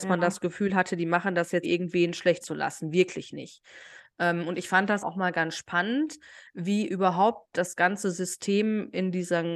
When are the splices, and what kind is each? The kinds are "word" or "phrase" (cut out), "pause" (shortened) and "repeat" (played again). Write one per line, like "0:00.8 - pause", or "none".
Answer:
0:01.6 - word
0:02.4 - word
0:05.0 - word